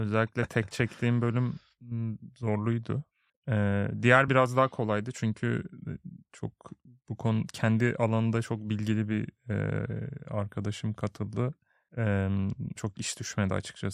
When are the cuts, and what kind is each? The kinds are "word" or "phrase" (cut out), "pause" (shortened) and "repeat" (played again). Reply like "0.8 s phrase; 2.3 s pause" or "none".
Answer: 3.3 s pause; 4.3 s word; 6.9 s pause; 12.8 s word

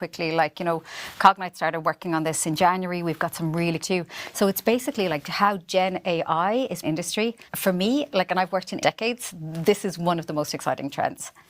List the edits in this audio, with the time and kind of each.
3.8 s phrase; 6.8 s phrase; 7.5 s pause; 8.8 s phrase

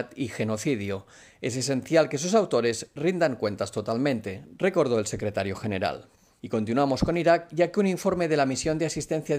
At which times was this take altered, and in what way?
none

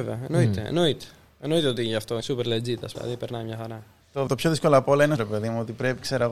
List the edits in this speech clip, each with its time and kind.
2.2 s word; 3.0 s word; 4.3 s word; 5.2 s word

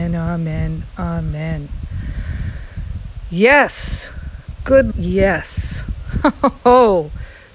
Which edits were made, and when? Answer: 4.9 s word

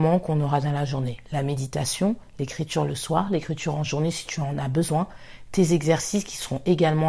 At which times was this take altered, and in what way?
none

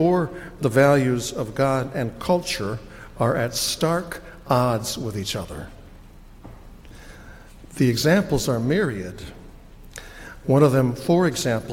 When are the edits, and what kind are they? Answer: none

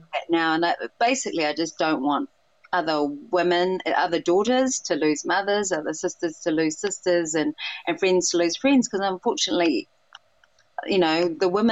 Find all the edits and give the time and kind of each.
none

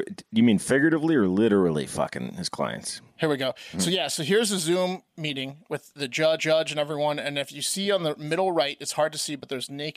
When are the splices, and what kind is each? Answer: 6.4 s repeat

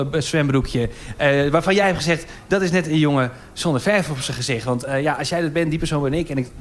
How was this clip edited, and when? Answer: none

